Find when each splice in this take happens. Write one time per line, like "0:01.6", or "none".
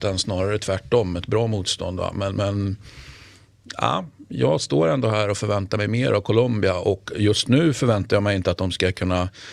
none